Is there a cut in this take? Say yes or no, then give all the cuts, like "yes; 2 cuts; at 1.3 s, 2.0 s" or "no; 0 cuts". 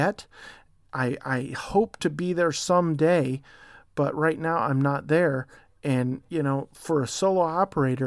no; 0 cuts